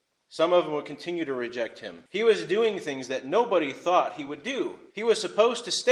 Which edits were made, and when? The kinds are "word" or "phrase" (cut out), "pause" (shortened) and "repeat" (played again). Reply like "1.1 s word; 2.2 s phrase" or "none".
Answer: 2.1 s pause; 4.9 s pause